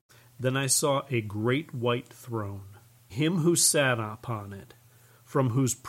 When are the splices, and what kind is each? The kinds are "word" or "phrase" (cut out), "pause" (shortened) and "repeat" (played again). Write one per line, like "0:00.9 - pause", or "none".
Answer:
0:03.1 - word